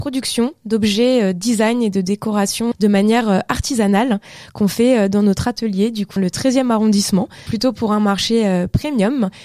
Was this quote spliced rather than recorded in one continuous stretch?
yes; 3 cuts; at 2.7 s, 6.2 s, 7.5 s

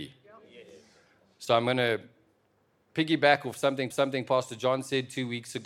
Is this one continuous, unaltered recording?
no; 1 cut; at 3.9 s

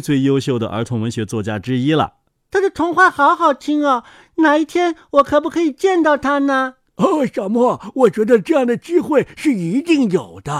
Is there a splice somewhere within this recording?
no; 0 cuts

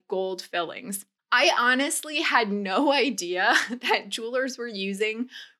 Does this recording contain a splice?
no; 0 cuts

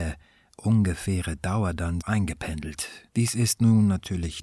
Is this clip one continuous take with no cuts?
no; 2 cuts; at 2.0 s, 3.1 s

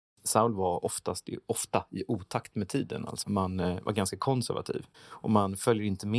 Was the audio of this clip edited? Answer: yes; 2 cuts; at 3.2 s, 4.9 s

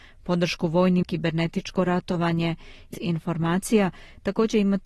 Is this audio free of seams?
no; 2 cuts; at 1.0 s, 2.9 s

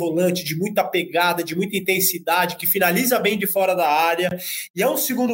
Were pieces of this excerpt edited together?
no; 0 cuts

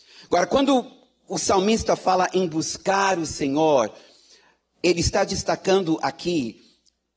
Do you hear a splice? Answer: no; 0 cuts

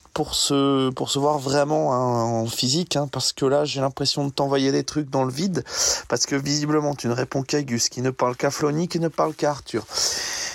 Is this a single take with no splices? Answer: yes; 0 cuts

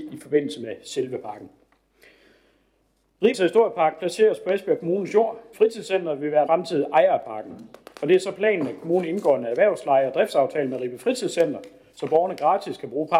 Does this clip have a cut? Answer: yes; 3 cuts; at 3.3 s, 5.5 s, 6.5 s

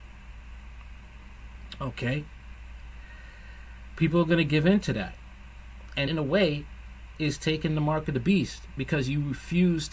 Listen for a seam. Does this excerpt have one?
yes; 1 cut; at 6.1 s

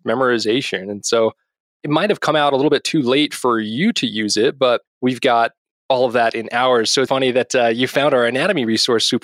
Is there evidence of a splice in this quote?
yes; 1 cut; at 7.1 s

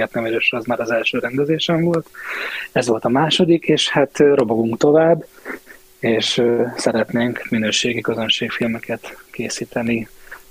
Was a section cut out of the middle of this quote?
no; 0 cuts

